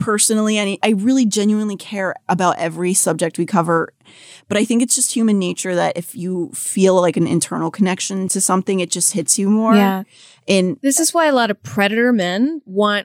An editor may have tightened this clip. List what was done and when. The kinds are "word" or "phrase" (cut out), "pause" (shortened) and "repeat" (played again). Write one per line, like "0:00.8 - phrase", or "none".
none